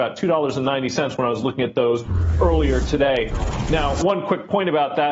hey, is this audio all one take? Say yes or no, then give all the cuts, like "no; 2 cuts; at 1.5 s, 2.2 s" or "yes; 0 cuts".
yes; 0 cuts